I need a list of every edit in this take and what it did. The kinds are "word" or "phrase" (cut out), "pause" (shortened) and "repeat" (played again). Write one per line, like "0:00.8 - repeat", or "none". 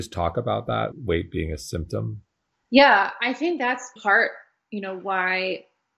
0:00.9 - word
0:02.5 - pause
0:04.0 - word